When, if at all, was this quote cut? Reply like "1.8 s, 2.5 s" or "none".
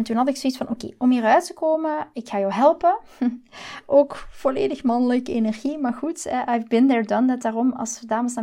none